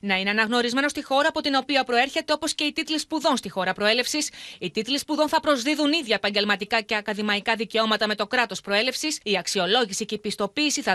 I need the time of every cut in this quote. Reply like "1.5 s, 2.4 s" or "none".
9.2 s